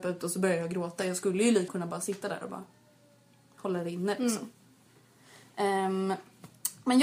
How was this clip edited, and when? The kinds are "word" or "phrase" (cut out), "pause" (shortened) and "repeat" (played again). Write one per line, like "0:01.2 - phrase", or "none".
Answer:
0:01.7 - word